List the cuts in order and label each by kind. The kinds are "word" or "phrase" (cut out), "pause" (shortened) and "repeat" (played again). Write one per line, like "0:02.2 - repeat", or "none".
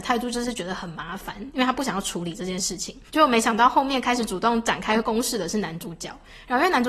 0:03.1 - pause